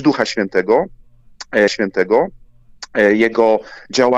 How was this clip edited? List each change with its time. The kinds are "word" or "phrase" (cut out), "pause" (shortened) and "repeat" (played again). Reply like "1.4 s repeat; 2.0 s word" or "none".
1.7 s repeat